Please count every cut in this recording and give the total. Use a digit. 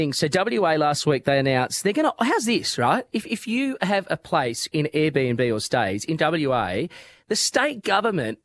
0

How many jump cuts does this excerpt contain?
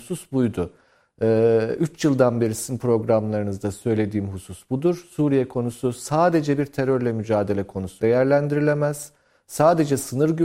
1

